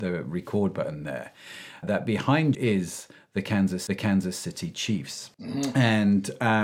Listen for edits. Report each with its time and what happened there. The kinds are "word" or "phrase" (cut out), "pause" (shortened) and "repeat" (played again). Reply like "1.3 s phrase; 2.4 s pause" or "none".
1.8 s word; 2.5 s word; 3.9 s repeat; 5.3 s pause